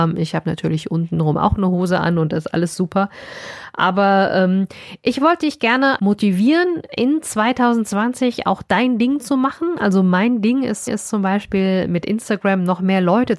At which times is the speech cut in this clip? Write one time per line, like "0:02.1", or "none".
0:06.0
0:10.9